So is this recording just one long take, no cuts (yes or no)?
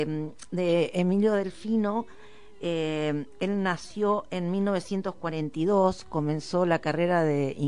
yes